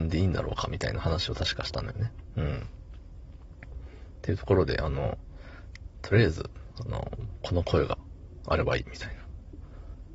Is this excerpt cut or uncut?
uncut